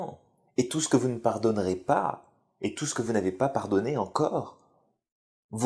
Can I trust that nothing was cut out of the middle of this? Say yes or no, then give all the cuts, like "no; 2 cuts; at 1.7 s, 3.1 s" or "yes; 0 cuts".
yes; 0 cuts